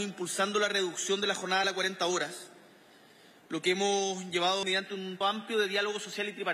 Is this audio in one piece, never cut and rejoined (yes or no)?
no